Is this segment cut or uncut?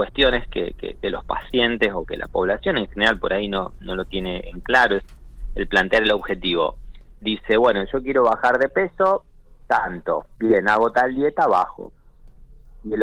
cut